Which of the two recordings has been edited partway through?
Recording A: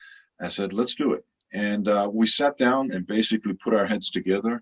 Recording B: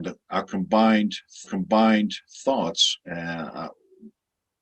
B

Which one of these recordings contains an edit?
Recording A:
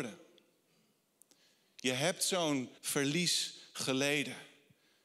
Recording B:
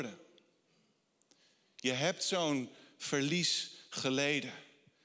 A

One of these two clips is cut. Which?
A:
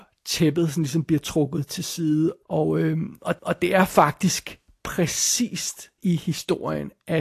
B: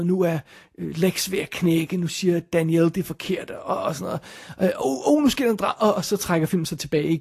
A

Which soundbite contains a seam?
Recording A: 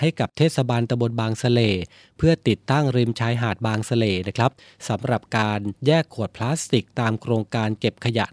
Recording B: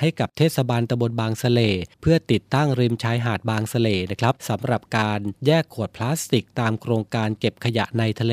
B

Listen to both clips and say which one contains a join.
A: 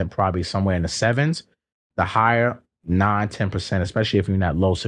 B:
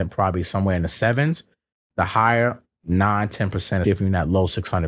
B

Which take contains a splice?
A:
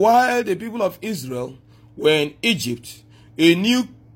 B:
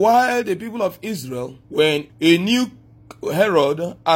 B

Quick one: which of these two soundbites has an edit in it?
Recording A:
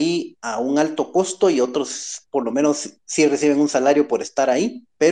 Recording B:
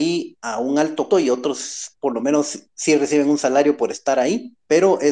B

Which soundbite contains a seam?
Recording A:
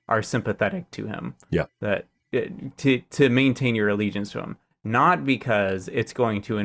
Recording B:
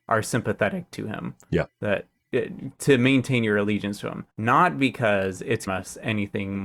B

